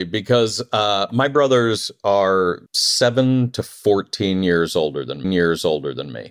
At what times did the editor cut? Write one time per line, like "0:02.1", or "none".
0:02.7
0:05.2